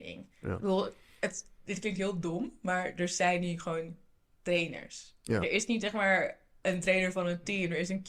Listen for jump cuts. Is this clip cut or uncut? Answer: uncut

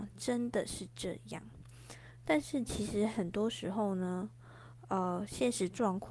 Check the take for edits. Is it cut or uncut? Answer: uncut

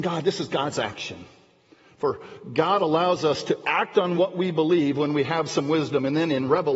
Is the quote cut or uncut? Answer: uncut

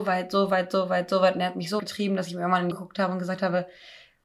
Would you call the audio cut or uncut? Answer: cut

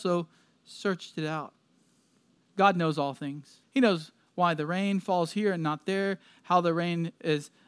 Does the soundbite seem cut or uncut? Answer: cut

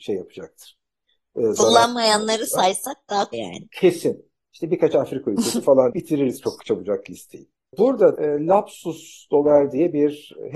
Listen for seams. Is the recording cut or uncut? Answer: cut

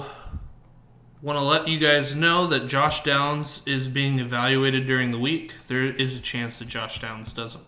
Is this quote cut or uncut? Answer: uncut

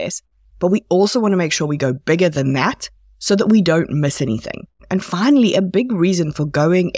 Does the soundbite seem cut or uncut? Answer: uncut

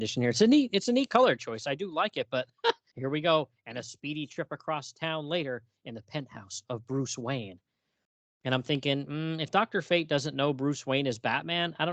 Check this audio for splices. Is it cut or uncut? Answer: cut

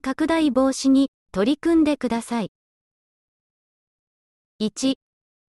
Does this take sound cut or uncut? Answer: uncut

